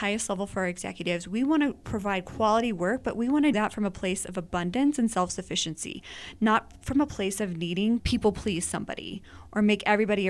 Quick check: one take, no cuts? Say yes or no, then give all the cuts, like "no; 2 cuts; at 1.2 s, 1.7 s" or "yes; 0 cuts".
no; 2 cuts; at 3.5 s, 8.0 s